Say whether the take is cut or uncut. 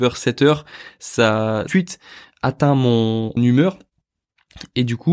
cut